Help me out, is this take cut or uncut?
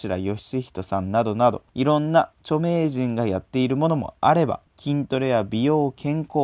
cut